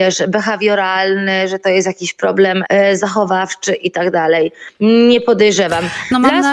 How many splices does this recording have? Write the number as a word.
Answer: one